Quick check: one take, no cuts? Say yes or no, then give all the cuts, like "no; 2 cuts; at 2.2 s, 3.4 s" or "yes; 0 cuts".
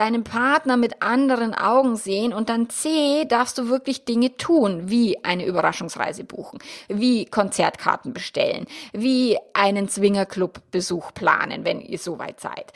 yes; 0 cuts